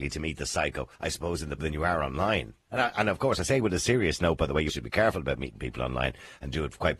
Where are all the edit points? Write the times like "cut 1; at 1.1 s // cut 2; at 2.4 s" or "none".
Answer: cut 1; at 0.9 s // cut 2; at 1.6 s // cut 3; at 4.7 s

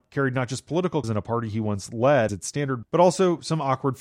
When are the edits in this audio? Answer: cut 1; at 1.0 s // cut 2; at 2.3 s // cut 3; at 2.8 s

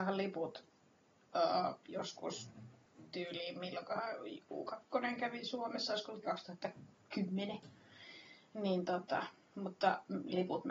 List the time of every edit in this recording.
cut 1; at 6.2 s

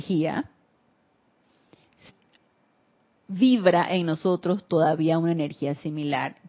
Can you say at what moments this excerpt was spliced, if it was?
cut 1; at 2.1 s

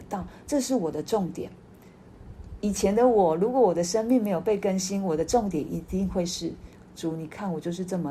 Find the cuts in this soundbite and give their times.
none

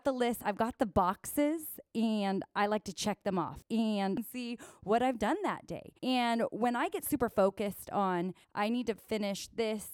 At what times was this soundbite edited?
cut 1; at 6.0 s // cut 2; at 8.4 s

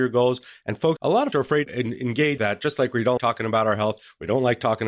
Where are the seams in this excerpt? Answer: cut 1; at 1.0 s // cut 2; at 1.3 s // cut 3; at 1.7 s // cut 4; at 2.4 s // cut 5; at 3.2 s

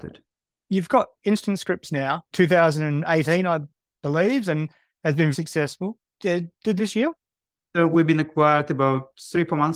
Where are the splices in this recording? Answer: cut 1; at 2.3 s // cut 2; at 5.3 s // cut 3; at 6.8 s

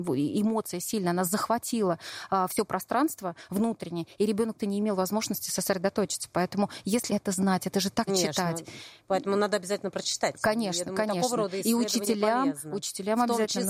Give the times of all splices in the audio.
cut 1; at 4.6 s // cut 2; at 7.1 s // cut 3; at 8.1 s

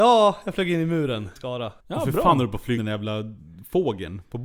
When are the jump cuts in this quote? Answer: cut 1; at 1.4 s // cut 2; at 1.8 s // cut 3; at 2.8 s

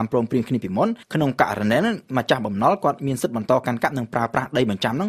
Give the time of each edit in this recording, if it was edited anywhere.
cut 1; at 1.0 s

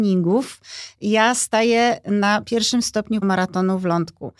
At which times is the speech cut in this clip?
cut 1; at 3.2 s

